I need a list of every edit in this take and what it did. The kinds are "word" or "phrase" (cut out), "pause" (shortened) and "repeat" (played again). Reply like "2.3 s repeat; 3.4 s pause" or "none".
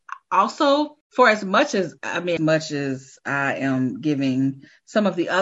1.0 s pause; 2.4 s phrase

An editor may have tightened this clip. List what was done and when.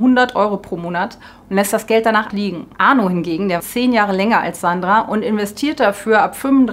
2.3 s word; 2.7 s pause; 3.6 s word

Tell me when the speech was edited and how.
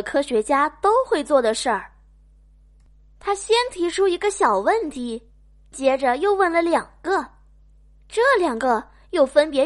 none

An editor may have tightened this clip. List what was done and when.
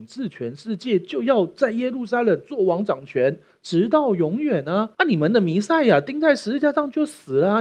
4.9 s pause

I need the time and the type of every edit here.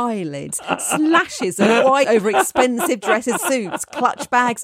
2.0 s word; 3.4 s word

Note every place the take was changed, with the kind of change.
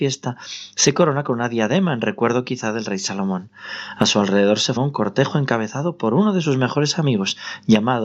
4.8 s word

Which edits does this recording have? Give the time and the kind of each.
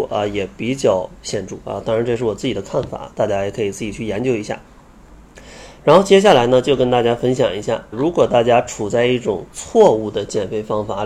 7.9 s word; 9.5 s pause

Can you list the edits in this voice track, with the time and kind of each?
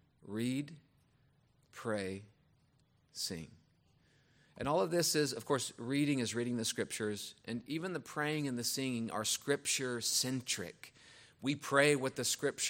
none

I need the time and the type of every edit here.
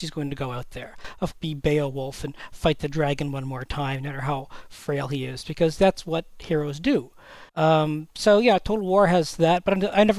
1.3 s phrase; 7.5 s pause

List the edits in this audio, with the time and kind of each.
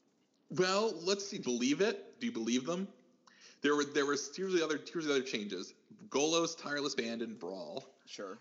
1.4 s word; 7.0 s word

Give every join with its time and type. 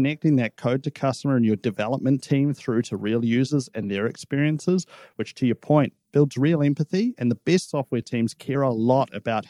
none

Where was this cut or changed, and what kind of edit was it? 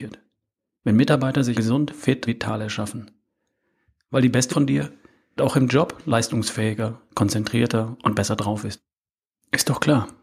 1.5 s word; 2.3 s word; 4.5 s word; 5.4 s word

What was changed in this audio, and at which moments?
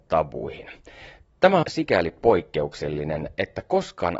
1.6 s phrase

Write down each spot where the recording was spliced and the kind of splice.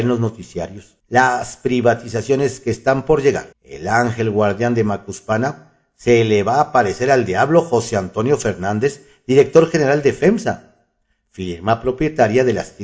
1.0 s pause; 3.5 s pause

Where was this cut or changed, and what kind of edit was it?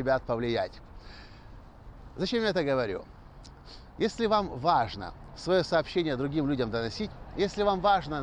none

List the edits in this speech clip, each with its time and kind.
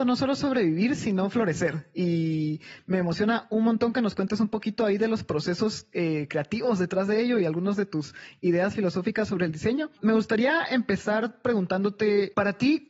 none

